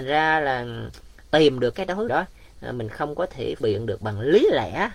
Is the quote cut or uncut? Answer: cut